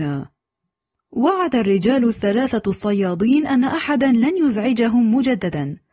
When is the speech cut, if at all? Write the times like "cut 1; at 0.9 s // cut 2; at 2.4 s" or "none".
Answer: none